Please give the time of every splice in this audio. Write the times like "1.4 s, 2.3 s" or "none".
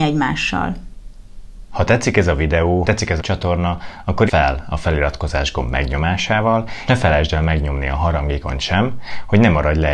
2.8 s, 3.2 s, 4.3 s, 6.9 s